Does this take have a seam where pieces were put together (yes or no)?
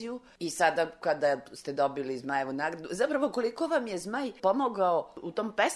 no